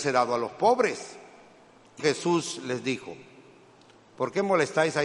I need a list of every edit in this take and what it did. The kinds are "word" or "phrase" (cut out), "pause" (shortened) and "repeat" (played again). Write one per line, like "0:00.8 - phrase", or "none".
0:02.0 - word

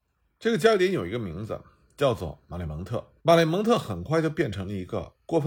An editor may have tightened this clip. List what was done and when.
0:03.2 - pause

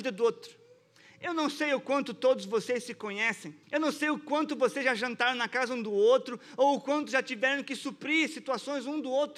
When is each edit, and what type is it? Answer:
0:03.6 - pause

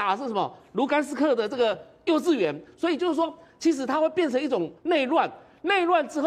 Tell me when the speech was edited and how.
0:04.8 - pause

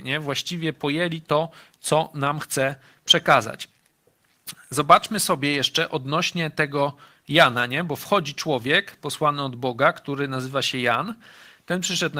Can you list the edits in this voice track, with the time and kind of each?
none

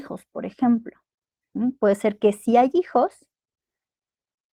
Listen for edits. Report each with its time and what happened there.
none

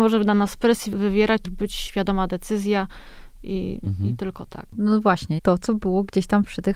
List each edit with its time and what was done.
0:01.4 - word
0:05.4 - phrase

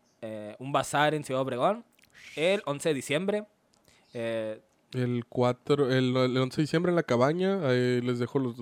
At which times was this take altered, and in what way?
none

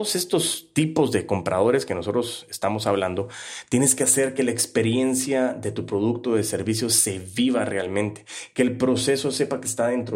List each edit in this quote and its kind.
none

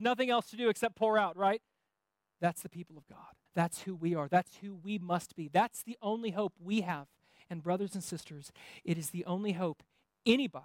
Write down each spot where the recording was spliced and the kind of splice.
0:03.5 - pause

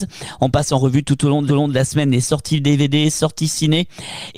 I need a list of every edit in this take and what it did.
0:01.5 - repeat

